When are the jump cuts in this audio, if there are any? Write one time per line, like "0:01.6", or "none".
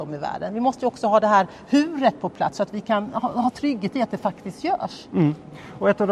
none